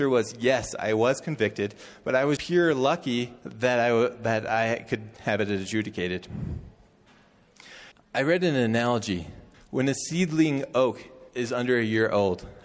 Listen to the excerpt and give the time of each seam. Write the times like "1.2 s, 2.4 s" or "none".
2.4 s, 3.4 s, 7.9 s, 9.5 s, 11.3 s